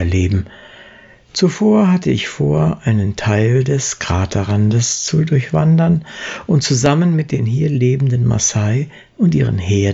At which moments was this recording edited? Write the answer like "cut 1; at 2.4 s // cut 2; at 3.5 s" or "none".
none